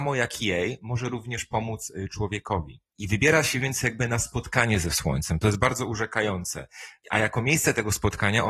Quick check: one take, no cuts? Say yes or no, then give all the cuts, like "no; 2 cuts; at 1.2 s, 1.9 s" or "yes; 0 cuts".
yes; 0 cuts